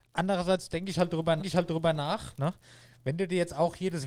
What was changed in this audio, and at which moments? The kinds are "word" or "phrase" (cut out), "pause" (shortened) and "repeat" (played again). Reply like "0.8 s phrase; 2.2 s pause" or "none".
1.4 s repeat